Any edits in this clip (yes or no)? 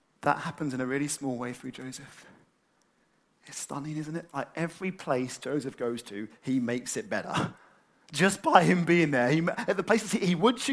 no